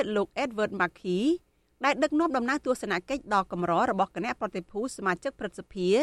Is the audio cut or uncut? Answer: uncut